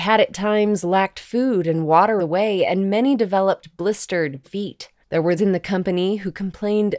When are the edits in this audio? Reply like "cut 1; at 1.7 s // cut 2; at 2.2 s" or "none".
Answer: cut 1; at 2.2 s // cut 2; at 4.4 s // cut 3; at 5.0 s // cut 4; at 5.4 s